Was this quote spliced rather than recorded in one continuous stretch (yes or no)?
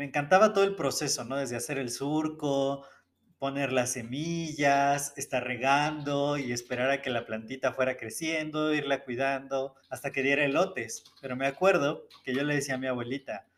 yes